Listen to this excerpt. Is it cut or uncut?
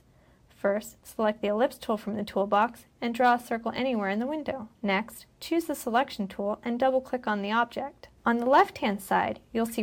cut